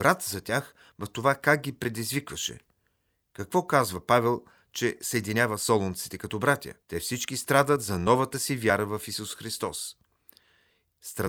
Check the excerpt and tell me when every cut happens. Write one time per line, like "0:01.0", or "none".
0:06.8